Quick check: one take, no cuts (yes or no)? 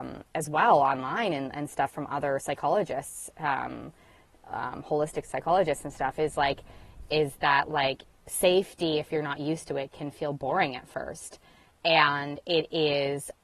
yes